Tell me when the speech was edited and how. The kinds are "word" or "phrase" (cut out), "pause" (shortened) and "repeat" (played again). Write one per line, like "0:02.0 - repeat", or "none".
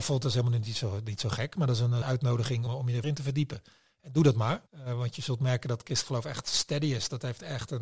0:02.0 - phrase
0:02.7 - word
0:03.0 - word
0:04.7 - pause